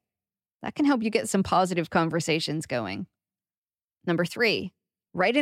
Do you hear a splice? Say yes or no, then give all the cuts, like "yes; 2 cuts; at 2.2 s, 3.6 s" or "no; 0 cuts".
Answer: no; 0 cuts